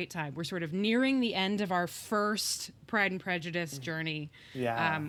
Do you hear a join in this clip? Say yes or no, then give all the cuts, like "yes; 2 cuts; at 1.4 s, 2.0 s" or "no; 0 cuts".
no; 0 cuts